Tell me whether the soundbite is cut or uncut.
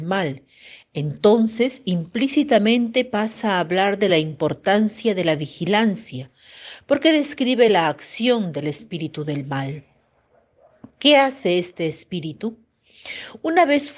uncut